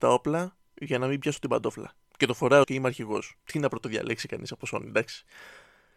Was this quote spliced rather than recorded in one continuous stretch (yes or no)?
yes